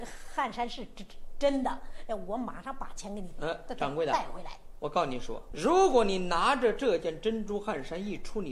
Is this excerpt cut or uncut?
cut